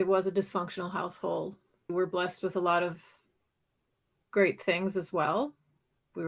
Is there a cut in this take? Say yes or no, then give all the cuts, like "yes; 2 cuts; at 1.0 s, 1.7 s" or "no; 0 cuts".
yes; 1 cut; at 1.9 s